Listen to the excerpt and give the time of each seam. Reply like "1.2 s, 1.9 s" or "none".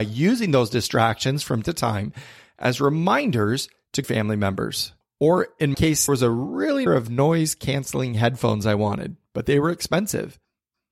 1.6 s, 4.0 s, 5.0 s, 5.7 s, 6.1 s, 6.9 s